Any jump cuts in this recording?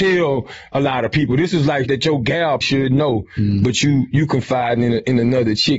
yes; 2 cuts; at 1.8 s, 2.6 s

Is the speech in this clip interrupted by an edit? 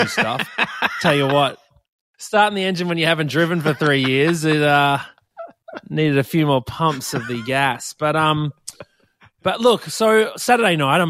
no; 0 cuts

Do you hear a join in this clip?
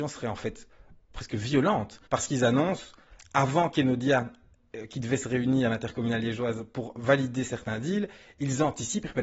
yes; 1 cut; at 2.1 s

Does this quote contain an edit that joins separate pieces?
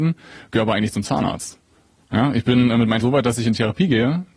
yes; 1 cut; at 3.0 s

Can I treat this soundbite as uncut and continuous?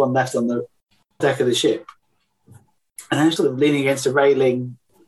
no; 2 cuts; at 1.2 s, 3.4 s

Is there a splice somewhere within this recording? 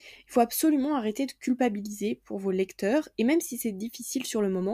no; 0 cuts

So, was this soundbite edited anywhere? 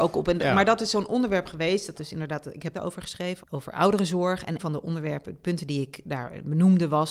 yes; 4 cuts; at 1.9 s, 2.7 s, 3.4 s, 4.6 s

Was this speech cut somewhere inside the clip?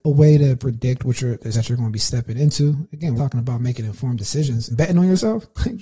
yes; 3 cuts; at 1.5 s, 3.2 s, 4.7 s

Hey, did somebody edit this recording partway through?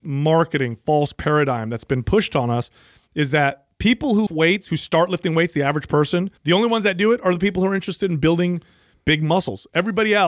yes; 2 cuts; at 4.3 s, 6.4 s

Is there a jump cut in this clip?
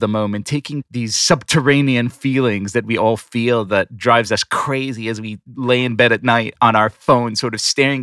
no; 0 cuts

